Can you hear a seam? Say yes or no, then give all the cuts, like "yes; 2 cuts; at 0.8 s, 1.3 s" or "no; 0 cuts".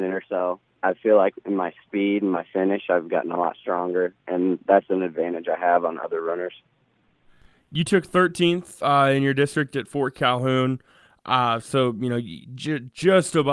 no; 0 cuts